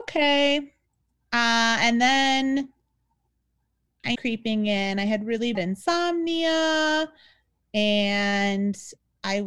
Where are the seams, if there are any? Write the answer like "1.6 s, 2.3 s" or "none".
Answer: 4.1 s, 5.5 s